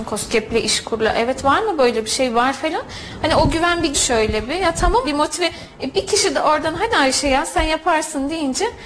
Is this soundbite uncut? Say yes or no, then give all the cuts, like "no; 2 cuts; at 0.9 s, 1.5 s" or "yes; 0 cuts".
no; 2 cuts; at 3.9 s, 5.0 s